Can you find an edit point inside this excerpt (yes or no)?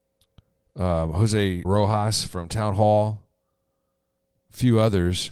yes